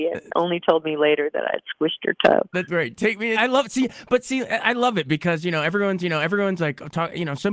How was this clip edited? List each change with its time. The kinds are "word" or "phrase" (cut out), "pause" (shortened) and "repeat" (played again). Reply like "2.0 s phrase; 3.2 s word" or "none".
2.7 s word; 3.3 s phrase; 6.0 s repeat